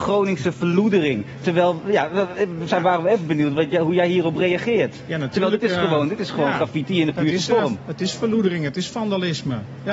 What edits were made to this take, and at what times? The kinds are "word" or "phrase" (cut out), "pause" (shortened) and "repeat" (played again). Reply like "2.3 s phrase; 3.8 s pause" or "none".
none

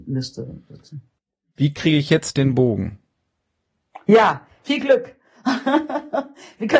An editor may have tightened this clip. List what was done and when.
none

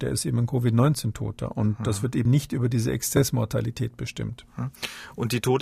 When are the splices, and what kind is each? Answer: 2.3 s word

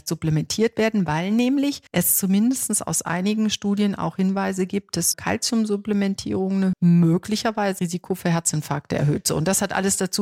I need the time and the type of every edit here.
1.9 s pause; 5.1 s word; 6.7 s word; 7.8 s word

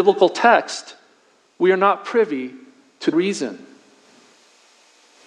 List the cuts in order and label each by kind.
3.1 s word

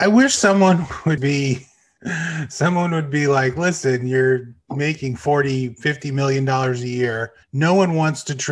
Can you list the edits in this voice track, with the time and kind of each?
1.2 s word; 7.4 s pause

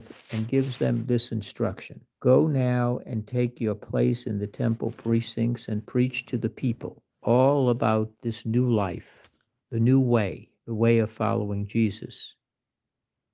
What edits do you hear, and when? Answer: 2.1 s pause; 7.1 s pause; 8.1 s pause; 9.6 s pause; 10.6 s pause

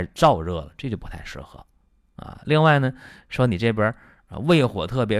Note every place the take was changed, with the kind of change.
none

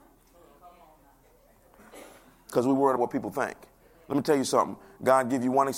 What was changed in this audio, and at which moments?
3.0 s word

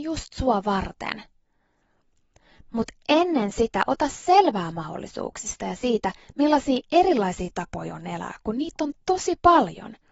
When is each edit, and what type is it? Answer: none

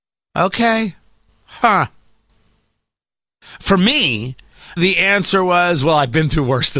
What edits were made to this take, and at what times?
4.8 s word

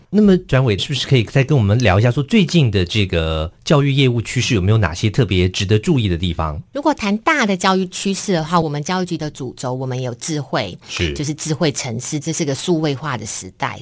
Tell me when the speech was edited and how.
6.7 s pause; 12.2 s phrase

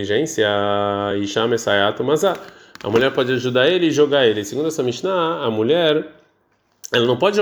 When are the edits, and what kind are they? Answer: none

